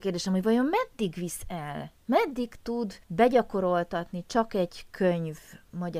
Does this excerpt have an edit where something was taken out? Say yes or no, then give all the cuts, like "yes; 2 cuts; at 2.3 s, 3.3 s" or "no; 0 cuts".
yes; 1 cut; at 3.0 s